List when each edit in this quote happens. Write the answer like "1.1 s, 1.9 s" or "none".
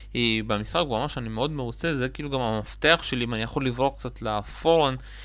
none